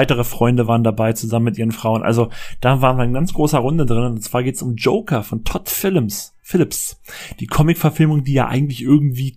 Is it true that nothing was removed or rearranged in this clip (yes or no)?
yes